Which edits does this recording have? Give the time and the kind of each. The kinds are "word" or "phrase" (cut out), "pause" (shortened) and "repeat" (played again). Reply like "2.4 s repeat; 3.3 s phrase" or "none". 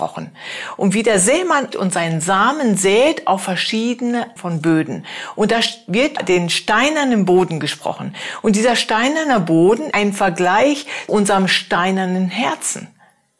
1.7 s word; 4.4 s word; 6.2 s word; 9.9 s word; 11.1 s word